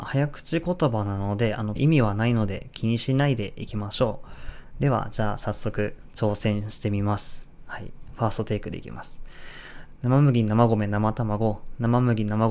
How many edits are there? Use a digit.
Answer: 1